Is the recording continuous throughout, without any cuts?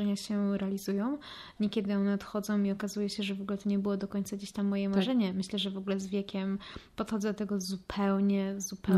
yes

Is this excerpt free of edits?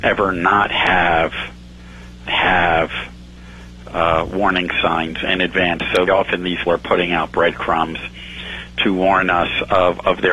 no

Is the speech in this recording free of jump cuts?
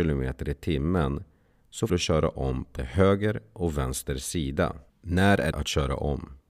no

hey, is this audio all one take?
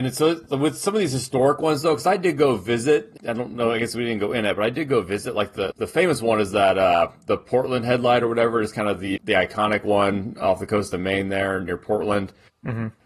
no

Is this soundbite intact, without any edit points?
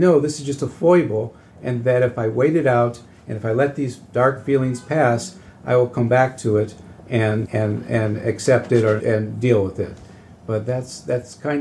no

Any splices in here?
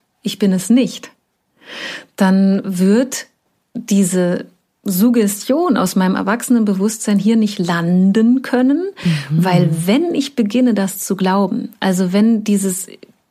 no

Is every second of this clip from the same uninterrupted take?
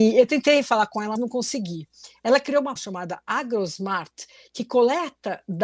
no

